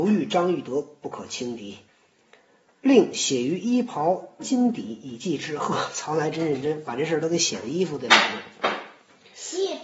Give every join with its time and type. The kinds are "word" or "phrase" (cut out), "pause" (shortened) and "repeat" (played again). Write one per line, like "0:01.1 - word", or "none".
0:01.9 - pause